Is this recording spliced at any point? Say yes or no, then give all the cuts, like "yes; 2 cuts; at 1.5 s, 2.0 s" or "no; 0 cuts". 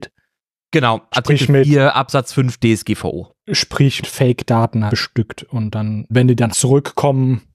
yes; 5 cuts; at 1.1 s, 4.0 s, 4.9 s, 6.1 s, 6.5 s